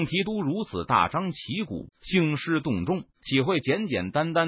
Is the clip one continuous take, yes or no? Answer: no